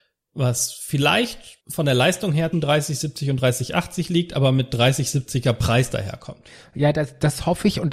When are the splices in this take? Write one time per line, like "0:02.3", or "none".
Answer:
0:01.6
0:02.5